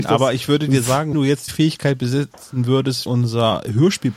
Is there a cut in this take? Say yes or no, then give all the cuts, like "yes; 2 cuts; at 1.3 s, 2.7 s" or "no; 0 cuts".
yes; 3 cuts; at 1.1 s, 1.5 s, 3.1 s